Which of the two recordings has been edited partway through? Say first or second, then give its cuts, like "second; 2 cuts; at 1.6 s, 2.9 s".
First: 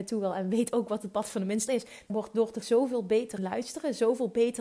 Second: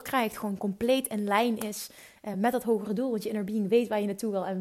first; 4 cuts; at 1.7 s, 2.1 s, 2.6 s, 3.4 s